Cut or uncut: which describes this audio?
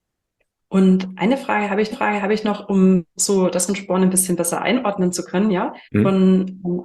cut